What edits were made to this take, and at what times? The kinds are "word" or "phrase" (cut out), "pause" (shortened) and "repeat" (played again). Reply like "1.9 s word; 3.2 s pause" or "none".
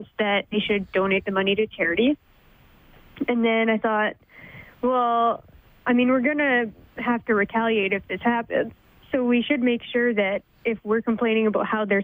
none

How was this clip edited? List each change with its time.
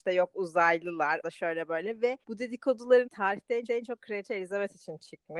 1.2 s word; 2.2 s pause; 3.0 s word; 3.7 s repeat

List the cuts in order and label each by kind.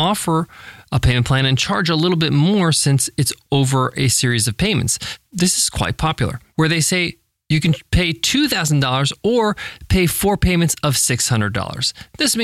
none

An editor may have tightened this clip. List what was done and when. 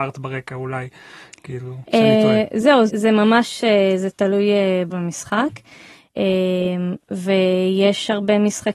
1.9 s pause; 2.9 s word; 4.9 s word

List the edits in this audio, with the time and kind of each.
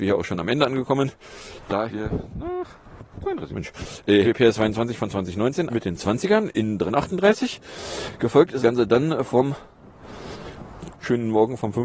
1.9 s word; 3.5 s word; 4.2 s word; 5.7 s word; 6.9 s word; 8.6 s word; 10.9 s word

